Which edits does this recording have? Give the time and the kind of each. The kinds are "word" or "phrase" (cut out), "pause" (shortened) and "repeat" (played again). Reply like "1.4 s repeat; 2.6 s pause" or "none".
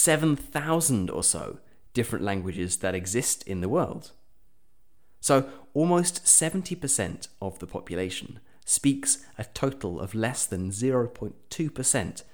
none